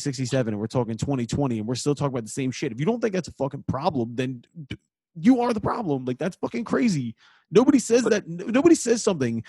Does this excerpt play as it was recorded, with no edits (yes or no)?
yes